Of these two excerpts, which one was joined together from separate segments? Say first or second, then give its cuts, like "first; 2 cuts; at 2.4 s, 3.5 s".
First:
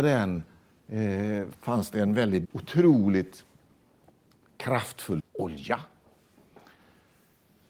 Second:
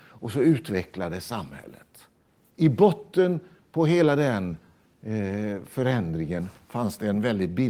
first; 3 cuts; at 1.5 s, 2.4 s, 5.2 s